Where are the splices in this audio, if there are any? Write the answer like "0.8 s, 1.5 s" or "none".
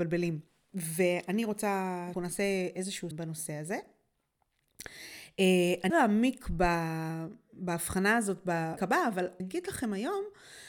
2.1 s, 3.1 s, 5.9 s, 8.8 s, 9.4 s